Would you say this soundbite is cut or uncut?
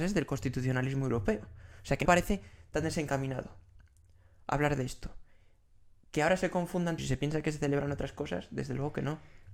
cut